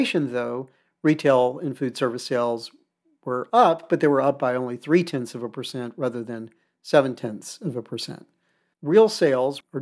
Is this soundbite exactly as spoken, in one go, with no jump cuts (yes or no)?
yes